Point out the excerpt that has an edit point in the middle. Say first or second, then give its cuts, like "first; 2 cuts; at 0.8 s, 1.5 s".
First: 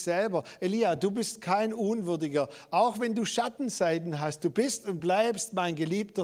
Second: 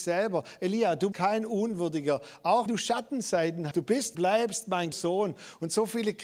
second; 5 cuts; at 1.1 s, 2.7 s, 3.7 s, 4.1 s, 4.9 s